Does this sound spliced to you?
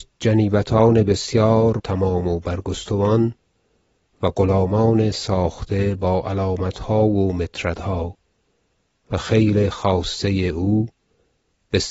yes; 1 cut; at 1.8 s

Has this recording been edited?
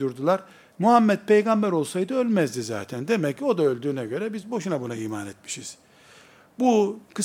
no; 0 cuts

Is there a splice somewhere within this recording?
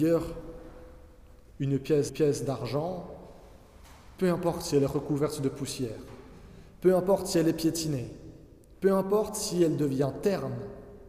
yes; 1 cut; at 2.1 s

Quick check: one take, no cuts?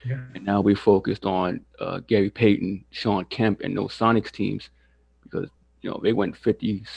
yes; 0 cuts

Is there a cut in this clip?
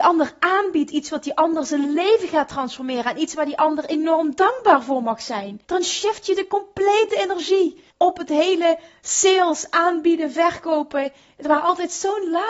yes; 2 cuts; at 5.6 s, 7.9 s

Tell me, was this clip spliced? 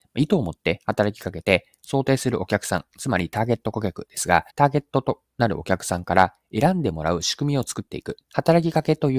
yes; 2 cuts; at 4.5 s, 8.2 s

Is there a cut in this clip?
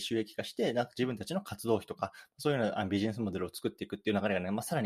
no; 0 cuts

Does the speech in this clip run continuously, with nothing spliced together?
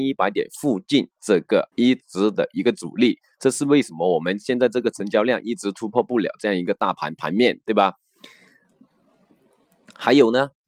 no; 1 cut; at 1.7 s

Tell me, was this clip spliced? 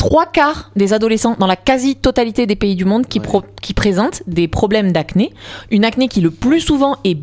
no; 0 cuts

